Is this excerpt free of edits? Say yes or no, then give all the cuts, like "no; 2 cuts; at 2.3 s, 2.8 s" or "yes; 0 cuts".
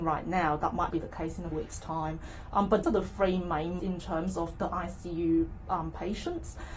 no; 4 cuts; at 0.9 s, 1.5 s, 2.8 s, 3.8 s